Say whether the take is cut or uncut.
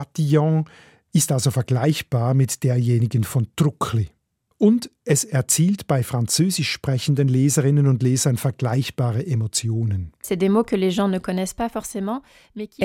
uncut